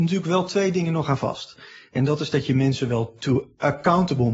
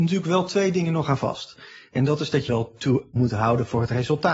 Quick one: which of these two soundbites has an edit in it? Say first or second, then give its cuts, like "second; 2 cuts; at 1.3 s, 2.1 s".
second; 2 cuts; at 2.5 s, 3.2 s